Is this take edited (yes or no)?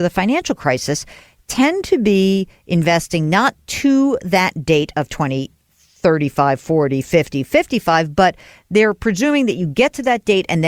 no